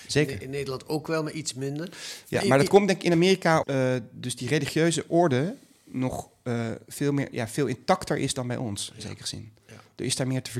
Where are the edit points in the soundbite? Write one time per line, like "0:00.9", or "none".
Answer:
0:03.6